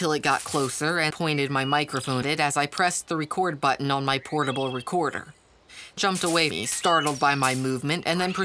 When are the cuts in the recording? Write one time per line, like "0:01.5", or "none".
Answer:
0:01.1
0:02.2
0:06.0
0:06.5